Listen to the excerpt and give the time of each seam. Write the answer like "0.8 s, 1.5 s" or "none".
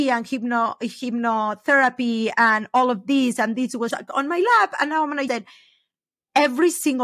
3.9 s, 5.3 s